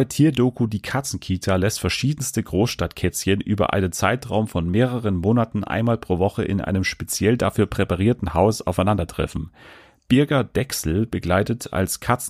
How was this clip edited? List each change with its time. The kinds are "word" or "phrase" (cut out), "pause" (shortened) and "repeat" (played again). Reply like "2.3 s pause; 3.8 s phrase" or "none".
none